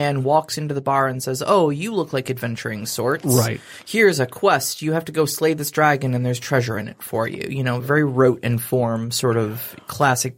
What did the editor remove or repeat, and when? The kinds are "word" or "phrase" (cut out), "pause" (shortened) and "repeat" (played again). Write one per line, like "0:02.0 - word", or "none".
0:07.8 - word